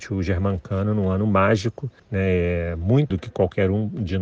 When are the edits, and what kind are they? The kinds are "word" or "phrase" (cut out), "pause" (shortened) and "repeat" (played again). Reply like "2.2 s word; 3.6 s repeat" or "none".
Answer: 2.0 s pause; 3.1 s word